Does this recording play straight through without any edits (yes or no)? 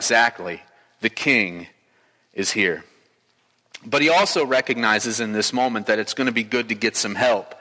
yes